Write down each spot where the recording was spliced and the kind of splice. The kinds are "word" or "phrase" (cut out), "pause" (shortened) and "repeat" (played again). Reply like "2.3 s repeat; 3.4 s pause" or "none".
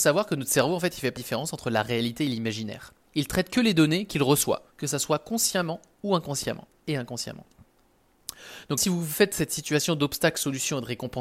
1.2 s word; 4.7 s pause; 8.8 s word